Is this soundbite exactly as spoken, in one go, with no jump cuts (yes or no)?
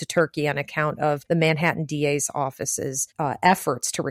no